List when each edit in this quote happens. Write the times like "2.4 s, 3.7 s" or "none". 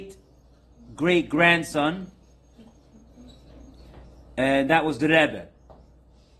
none